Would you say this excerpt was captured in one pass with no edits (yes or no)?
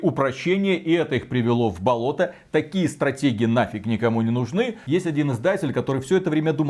yes